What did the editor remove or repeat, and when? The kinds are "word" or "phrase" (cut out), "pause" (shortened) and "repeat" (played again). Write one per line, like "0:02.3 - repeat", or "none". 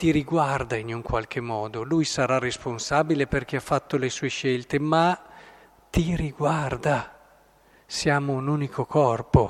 none